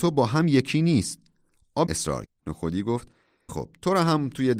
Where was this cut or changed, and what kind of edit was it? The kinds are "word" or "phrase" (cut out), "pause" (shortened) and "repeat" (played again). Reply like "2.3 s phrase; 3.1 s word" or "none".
1.9 s word; 2.3 s word; 3.5 s word